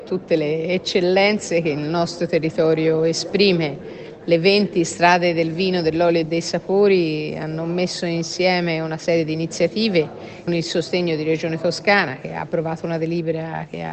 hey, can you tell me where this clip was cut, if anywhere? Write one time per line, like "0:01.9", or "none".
0:10.5